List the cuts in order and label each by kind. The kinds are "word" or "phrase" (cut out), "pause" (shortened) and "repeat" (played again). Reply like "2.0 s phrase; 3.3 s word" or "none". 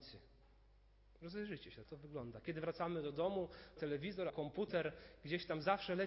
1.8 s word; 3.8 s word; 4.3 s word